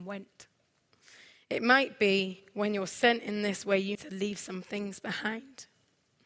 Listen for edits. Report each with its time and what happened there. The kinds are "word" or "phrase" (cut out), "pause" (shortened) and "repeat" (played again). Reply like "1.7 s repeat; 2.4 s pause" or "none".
3.9 s word